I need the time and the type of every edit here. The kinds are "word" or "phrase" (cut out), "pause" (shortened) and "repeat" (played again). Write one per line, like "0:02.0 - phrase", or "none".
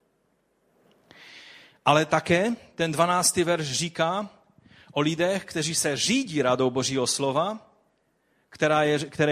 none